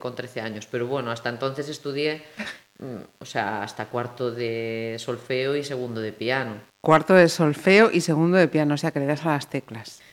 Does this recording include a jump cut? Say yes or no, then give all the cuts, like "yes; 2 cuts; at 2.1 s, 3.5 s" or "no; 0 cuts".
no; 0 cuts